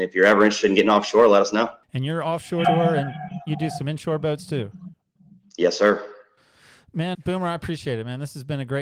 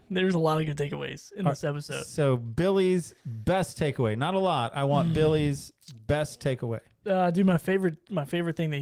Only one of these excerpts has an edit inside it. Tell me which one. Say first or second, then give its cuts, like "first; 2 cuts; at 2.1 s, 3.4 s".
first; 3 cuts; at 1.8 s, 2.6 s, 7.1 s